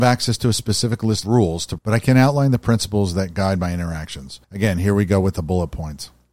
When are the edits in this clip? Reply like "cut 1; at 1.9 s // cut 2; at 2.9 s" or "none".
cut 1; at 1.2 s // cut 2; at 1.8 s // cut 3; at 4.4 s